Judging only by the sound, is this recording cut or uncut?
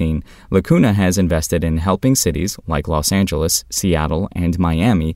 uncut